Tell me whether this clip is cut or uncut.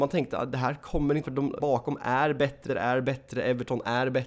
cut